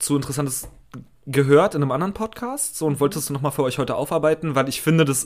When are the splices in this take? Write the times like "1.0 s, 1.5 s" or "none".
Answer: none